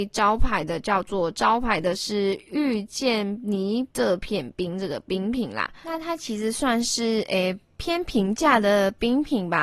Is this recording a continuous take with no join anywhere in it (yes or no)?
no